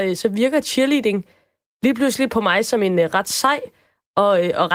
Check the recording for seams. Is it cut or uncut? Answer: uncut